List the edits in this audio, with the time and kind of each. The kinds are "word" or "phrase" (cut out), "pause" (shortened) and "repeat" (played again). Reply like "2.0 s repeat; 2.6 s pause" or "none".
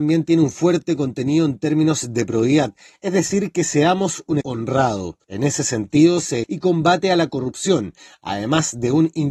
4.4 s word; 5.2 s pause; 6.4 s phrase